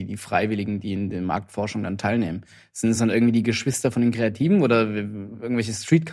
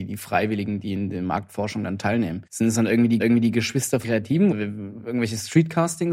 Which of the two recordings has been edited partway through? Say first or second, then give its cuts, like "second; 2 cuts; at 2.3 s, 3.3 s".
second; 4 cuts; at 2.5 s, 3.2 s, 4.0 s, 4.5 s